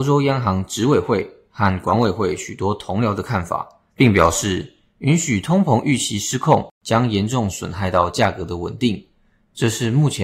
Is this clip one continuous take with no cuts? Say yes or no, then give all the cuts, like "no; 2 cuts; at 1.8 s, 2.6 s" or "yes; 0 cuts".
no; 2 cuts; at 3.9 s, 6.7 s